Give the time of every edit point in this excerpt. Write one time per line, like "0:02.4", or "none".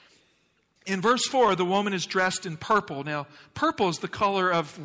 none